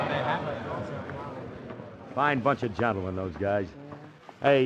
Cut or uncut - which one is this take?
uncut